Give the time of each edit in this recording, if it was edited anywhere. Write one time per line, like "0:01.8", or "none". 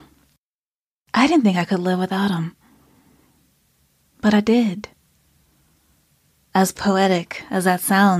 none